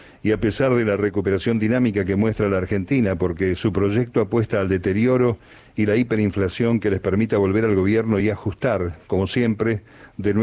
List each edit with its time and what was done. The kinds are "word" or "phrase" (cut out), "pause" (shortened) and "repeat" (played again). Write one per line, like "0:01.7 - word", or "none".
none

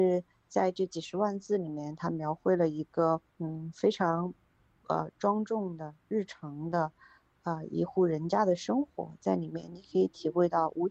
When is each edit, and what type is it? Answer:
0:03.3 - pause

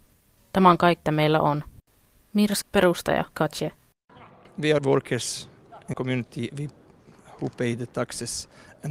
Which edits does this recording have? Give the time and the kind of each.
0:01.0 - word
0:02.6 - word
0:03.3 - word
0:04.8 - word
0:05.9 - word
0:06.5 - word

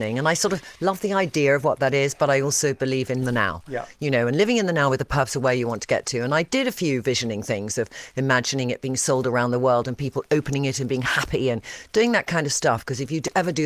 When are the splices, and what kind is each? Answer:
0:03.2 - phrase

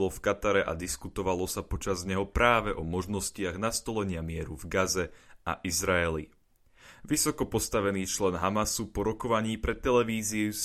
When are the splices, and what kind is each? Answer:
none

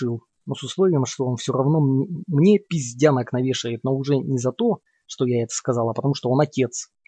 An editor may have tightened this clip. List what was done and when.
0:02.7 - pause

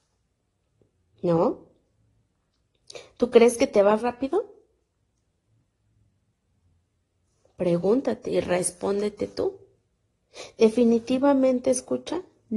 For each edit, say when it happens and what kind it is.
0:04.0 - word

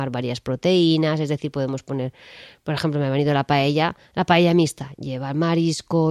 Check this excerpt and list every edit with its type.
none

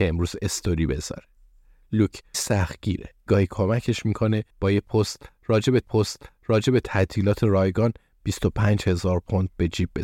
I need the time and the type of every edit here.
0:02.3 - word
0:03.3 - word
0:04.5 - pause
0:05.8 - repeat

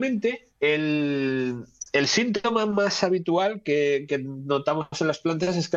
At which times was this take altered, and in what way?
none

